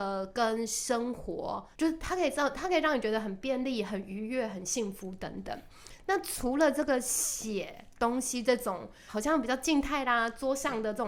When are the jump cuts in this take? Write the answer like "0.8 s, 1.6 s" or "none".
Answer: 1.7 s, 9.1 s